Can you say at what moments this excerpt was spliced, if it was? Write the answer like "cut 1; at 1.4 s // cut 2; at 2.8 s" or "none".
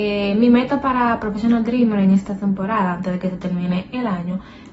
cut 1; at 2.3 s